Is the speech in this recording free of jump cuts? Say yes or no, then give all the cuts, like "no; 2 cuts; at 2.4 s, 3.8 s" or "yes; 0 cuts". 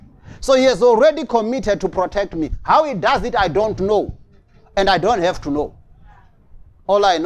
yes; 0 cuts